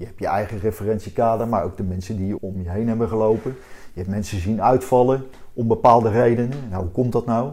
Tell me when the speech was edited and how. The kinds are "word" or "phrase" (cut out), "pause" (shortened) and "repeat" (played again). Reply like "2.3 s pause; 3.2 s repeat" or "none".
2.4 s word